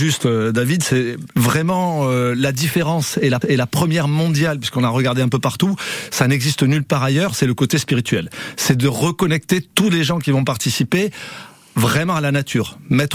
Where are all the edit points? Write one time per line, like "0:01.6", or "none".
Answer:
0:01.3
0:03.4

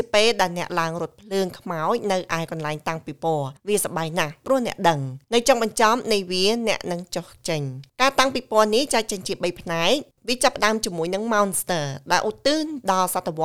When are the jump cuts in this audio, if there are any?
0:03.6
0:05.2
0:07.9

